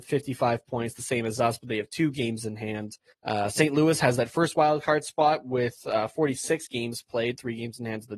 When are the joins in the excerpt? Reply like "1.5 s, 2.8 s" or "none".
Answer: 3.1 s